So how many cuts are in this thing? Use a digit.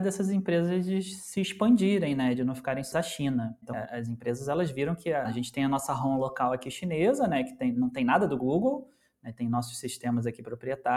3